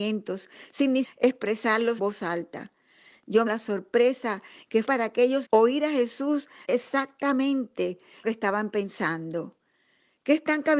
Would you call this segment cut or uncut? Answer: cut